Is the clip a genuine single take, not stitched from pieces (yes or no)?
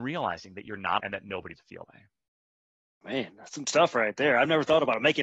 no